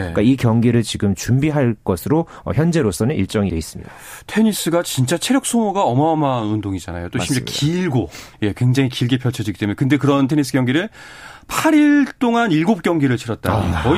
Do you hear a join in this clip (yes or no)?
yes